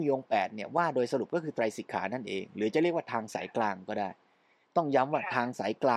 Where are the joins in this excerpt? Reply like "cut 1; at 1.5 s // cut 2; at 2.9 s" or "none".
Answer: none